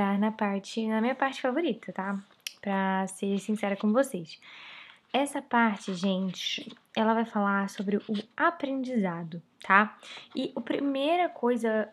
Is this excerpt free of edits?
yes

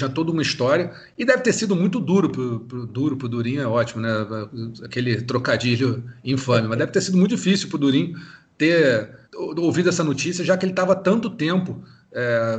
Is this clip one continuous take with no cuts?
no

